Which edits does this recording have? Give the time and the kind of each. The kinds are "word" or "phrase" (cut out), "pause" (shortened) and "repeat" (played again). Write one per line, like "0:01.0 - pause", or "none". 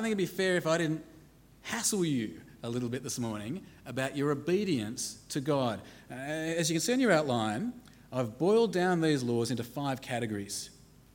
none